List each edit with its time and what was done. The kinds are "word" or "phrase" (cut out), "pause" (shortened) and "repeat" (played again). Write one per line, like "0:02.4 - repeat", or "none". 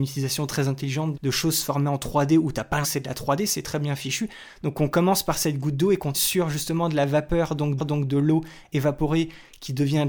0:01.1 - word
0:02.8 - word
0:06.1 - word
0:07.8 - repeat